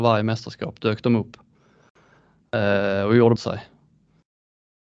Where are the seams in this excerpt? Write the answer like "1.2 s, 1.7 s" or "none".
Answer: 3.4 s